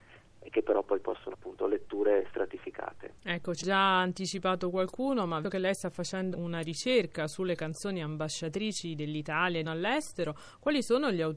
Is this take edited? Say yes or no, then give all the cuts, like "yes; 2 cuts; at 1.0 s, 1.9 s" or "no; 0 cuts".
yes; 5 cuts; at 1.3 s, 3.6 s, 5.4 s, 6.3 s, 9.6 s